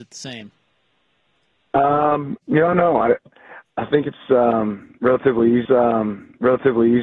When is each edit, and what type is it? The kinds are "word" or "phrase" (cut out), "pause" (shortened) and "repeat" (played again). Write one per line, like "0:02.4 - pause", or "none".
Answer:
0:02.4 - pause
0:02.7 - word
0:03.6 - word
0:05.7 - repeat